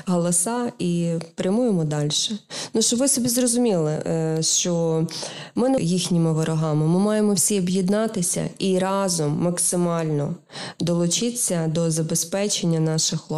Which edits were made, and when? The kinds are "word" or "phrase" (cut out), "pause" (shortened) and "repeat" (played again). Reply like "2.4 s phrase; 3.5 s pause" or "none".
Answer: 5.8 s phrase